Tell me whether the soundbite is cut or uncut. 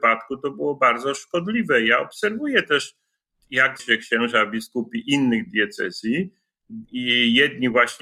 cut